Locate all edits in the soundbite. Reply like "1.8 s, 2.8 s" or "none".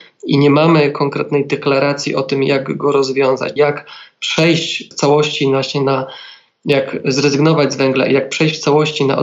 3.6 s, 4.9 s